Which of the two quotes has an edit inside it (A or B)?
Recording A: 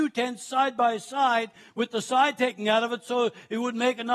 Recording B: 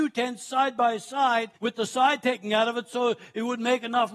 B